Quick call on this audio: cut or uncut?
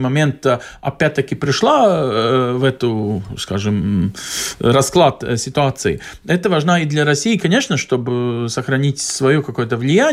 uncut